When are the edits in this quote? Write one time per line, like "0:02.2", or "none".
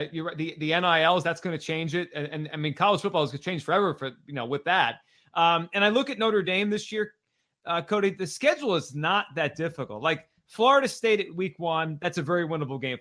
none